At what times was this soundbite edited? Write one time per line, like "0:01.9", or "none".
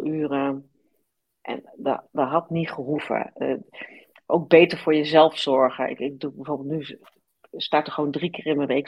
none